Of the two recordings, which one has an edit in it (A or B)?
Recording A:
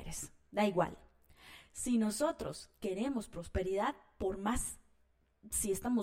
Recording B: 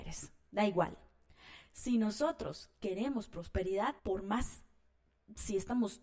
B